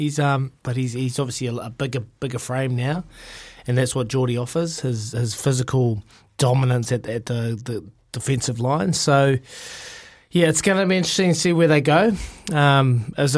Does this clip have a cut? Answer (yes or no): no